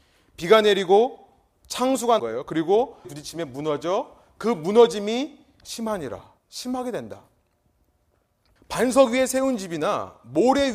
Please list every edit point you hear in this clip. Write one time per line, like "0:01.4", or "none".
0:02.2
0:03.0
0:06.4